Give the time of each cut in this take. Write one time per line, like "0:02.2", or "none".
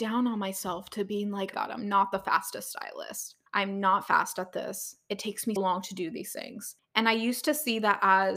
0:01.5
0:03.5
0:05.6
0:06.8